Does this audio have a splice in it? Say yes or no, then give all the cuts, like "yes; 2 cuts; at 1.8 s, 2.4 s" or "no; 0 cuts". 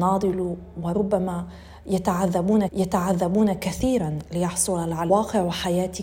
yes; 2 cuts; at 2.7 s, 5.1 s